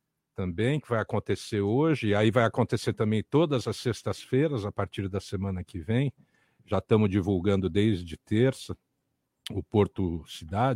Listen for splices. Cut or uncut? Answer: uncut